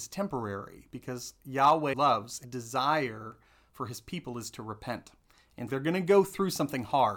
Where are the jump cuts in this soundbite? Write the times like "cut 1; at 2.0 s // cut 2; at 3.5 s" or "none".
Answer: cut 1; at 1.9 s // cut 2; at 2.4 s // cut 3; at 5.7 s